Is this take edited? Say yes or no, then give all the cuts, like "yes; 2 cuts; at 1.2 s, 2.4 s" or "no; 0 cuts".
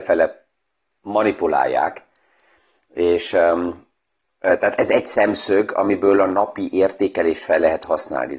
no; 0 cuts